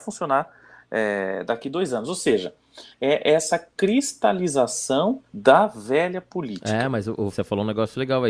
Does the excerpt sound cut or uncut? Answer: cut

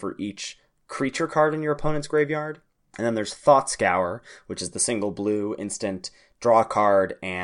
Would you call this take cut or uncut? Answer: uncut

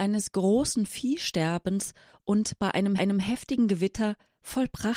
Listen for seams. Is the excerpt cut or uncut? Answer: cut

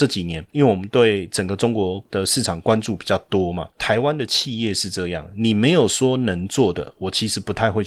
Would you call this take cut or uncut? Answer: cut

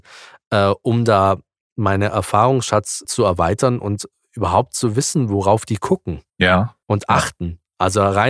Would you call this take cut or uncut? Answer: cut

